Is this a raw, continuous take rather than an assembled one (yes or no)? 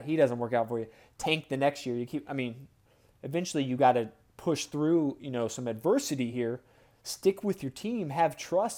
yes